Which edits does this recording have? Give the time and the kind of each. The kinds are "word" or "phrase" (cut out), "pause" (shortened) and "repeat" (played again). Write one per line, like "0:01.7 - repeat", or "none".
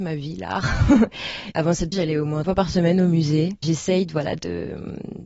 0:01.9 - word
0:02.4 - word